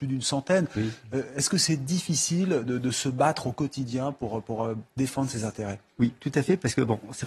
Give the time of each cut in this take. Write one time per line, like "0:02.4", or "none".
none